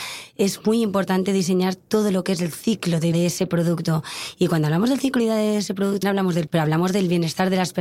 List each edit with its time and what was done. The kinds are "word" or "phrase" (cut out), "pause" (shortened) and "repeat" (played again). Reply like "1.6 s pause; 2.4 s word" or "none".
3.1 s word; 5.2 s word; 6.0 s word; 6.5 s word